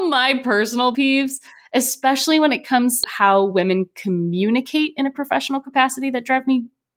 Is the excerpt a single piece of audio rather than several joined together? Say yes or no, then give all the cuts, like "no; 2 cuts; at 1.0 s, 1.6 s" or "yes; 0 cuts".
no; 2 cuts; at 0.9 s, 3.0 s